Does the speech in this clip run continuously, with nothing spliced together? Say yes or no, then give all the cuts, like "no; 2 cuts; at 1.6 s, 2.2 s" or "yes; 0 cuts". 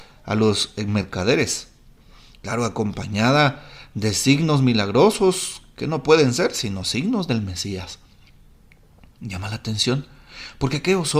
yes; 0 cuts